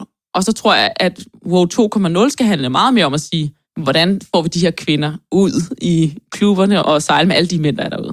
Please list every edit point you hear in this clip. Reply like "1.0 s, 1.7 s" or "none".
3.7 s, 6.8 s